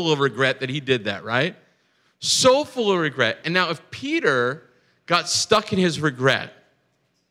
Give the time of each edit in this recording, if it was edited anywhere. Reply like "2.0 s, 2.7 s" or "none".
none